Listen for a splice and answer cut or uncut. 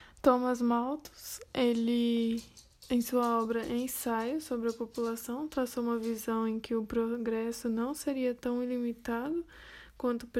uncut